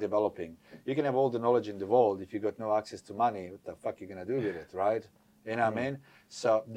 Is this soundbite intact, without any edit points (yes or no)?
yes